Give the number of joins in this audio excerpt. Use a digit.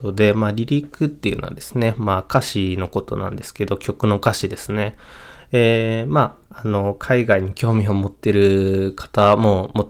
1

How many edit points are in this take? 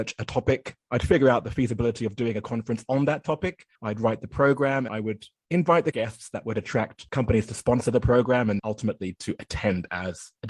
4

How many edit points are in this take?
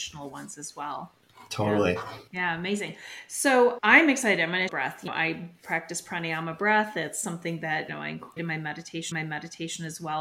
8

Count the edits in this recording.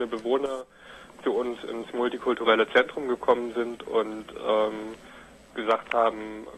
0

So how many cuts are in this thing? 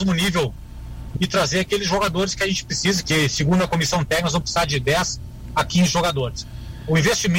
2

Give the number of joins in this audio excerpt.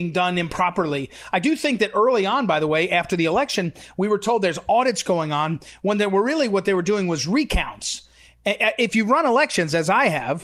0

